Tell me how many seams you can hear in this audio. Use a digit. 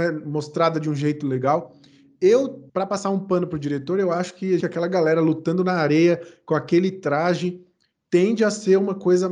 2